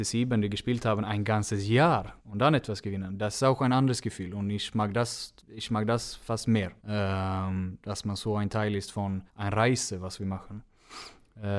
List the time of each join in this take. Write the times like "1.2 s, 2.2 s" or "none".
2.2 s, 5.4 s, 6.8 s, 9.3 s